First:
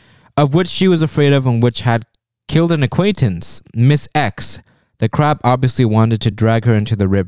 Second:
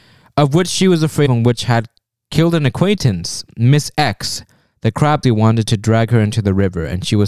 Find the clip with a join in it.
second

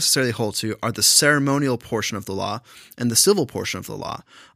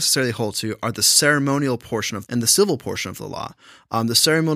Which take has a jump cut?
second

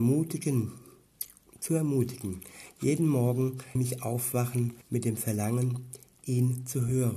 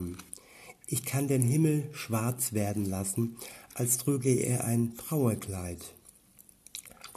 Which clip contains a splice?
first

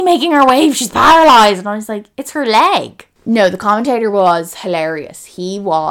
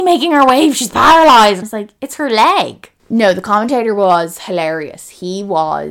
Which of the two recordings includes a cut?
second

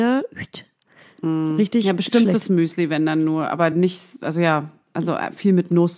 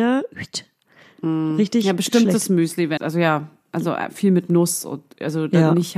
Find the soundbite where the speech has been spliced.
second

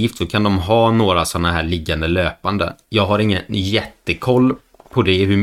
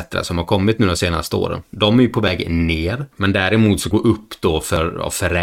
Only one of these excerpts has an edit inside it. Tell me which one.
second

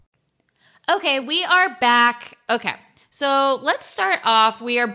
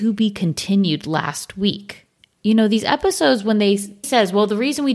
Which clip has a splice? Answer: second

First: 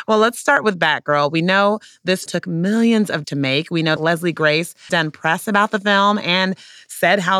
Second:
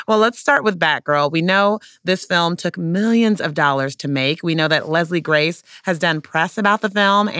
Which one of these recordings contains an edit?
first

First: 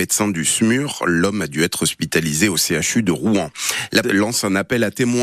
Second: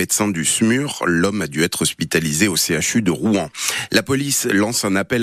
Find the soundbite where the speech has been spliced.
first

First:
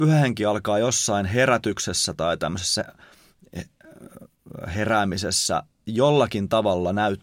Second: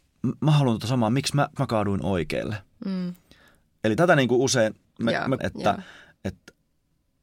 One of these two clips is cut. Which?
second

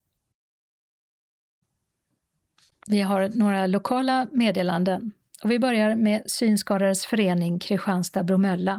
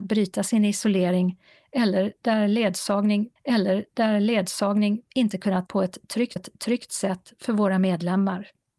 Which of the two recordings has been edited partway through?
second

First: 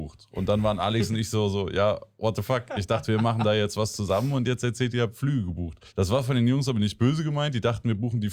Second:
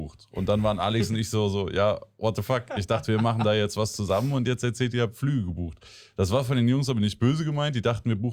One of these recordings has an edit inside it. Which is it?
first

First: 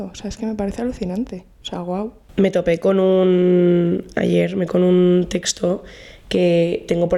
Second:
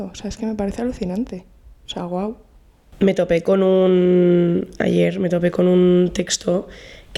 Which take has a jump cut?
first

